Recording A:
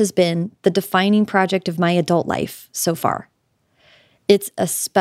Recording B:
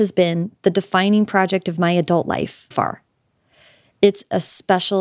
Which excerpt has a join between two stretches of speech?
B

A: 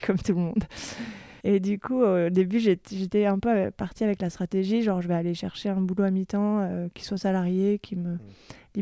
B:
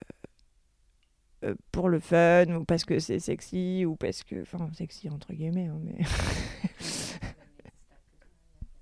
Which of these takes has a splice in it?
A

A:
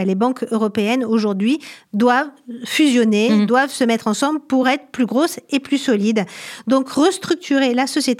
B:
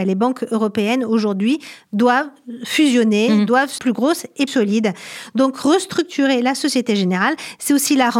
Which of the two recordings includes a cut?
B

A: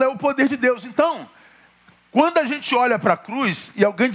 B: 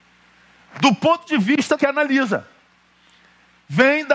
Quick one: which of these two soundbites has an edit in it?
B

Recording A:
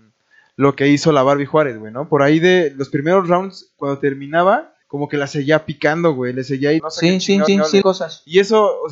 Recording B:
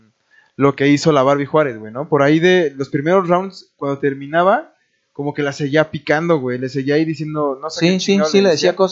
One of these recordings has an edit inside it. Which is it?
A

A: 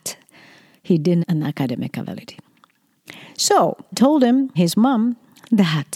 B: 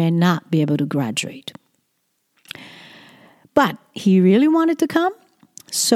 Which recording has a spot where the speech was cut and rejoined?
A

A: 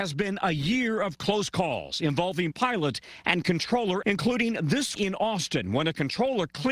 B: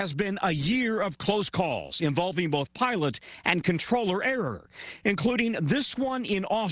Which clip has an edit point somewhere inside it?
A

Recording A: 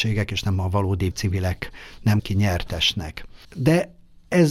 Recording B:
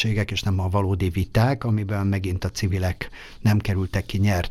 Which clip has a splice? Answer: A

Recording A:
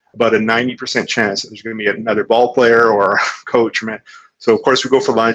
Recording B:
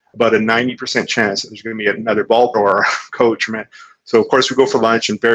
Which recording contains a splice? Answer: B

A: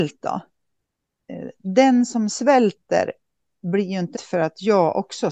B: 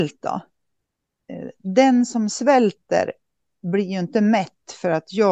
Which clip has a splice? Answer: A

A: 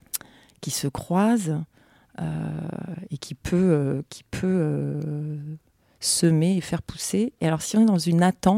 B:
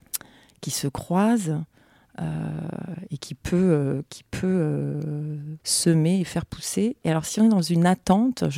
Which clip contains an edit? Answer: B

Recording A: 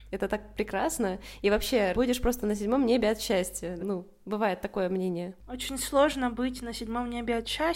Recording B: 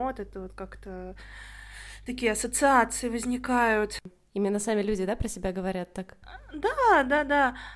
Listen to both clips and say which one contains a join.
A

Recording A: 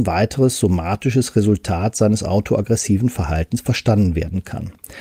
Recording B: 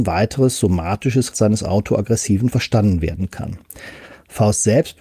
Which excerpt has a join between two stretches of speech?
B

